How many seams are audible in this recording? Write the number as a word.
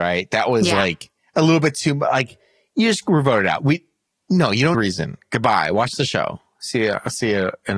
one